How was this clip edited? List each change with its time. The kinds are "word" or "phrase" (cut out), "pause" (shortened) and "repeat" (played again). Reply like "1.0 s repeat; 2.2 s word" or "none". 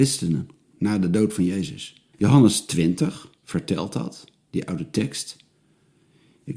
2.1 s pause; 3.4 s pause